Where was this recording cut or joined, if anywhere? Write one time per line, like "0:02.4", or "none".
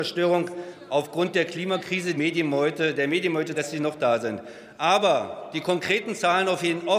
0:02.2
0:03.5